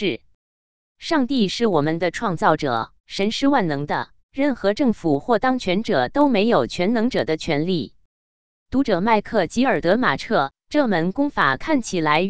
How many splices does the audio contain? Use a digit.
2